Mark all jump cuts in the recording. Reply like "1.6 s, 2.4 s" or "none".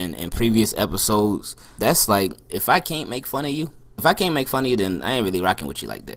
1.8 s, 2.5 s, 4.0 s